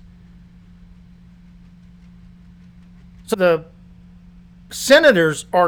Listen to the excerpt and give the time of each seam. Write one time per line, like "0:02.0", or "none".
0:03.3

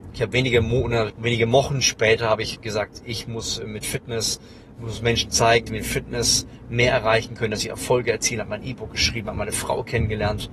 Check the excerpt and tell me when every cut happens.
0:01.1
0:02.5
0:05.7

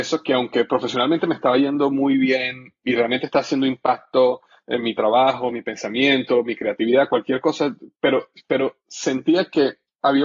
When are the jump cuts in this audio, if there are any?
none

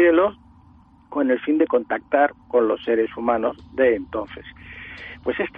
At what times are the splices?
none

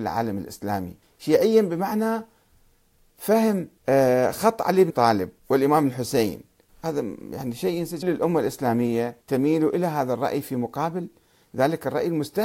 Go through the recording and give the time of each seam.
0:01.0
0:03.8
0:04.9
0:05.4
0:06.7
0:08.0
0:09.2

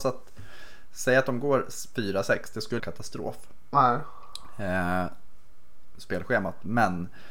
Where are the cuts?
0:02.8
0:06.0

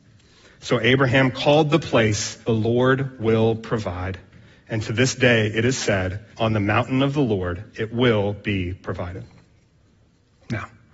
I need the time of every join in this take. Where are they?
0:02.4
0:06.3
0:07.7

